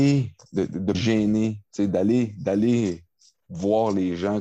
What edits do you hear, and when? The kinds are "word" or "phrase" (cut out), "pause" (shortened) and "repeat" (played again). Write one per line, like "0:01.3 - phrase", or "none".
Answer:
0:00.9 - phrase